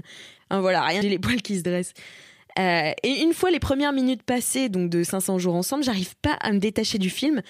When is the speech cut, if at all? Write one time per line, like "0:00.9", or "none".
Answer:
0:01.0